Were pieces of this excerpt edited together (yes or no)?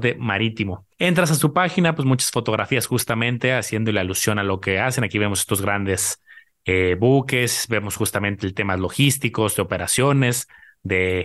yes